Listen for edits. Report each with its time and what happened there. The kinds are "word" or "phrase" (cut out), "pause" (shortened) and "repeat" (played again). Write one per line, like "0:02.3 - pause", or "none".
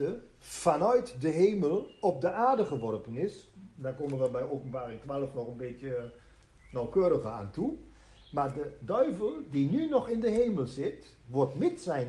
none

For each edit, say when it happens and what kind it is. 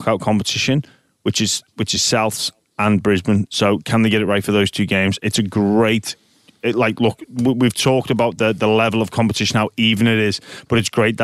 none

